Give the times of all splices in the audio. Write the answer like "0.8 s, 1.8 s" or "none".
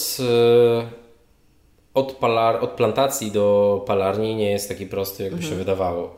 none